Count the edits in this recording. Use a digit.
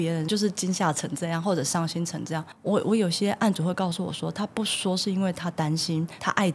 1